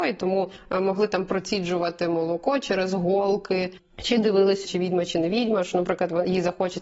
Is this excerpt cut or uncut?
cut